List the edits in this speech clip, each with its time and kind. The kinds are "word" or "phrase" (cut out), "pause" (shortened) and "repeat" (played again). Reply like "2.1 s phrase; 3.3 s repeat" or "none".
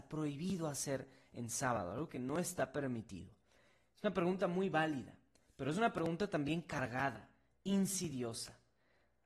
none